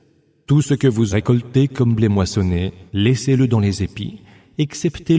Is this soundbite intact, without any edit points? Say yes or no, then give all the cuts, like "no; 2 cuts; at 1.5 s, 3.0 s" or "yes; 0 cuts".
no; 2 cuts; at 1.1 s, 2.9 s